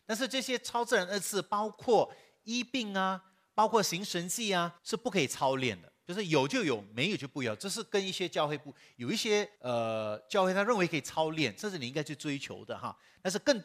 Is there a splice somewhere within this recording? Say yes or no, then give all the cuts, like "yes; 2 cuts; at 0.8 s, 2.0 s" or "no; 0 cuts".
yes; 2 cuts; at 4.8 s, 9.6 s